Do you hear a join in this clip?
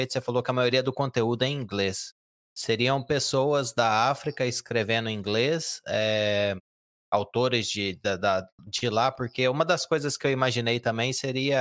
no; 0 cuts

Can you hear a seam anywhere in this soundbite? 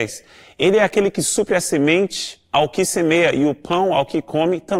no; 0 cuts

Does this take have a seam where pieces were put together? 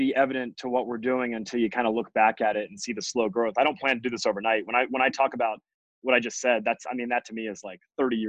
no; 0 cuts

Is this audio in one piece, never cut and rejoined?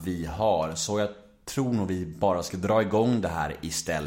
yes; 0 cuts

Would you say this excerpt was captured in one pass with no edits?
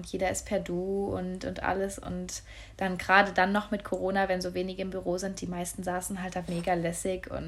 no; 1 cut; at 6.5 s

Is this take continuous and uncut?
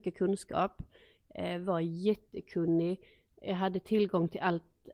yes; 0 cuts

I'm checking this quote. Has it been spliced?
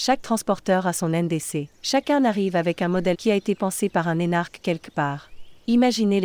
yes; 2 cuts; at 1.7 s, 3.1 s

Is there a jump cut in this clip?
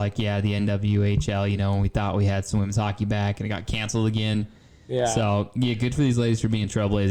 no; 0 cuts

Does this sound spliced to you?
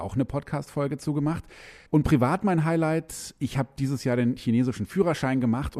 yes; 1 cut; at 1.9 s

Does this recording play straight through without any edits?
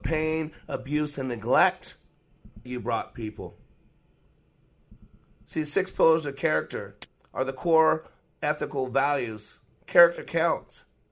no; 1 cut; at 2.7 s

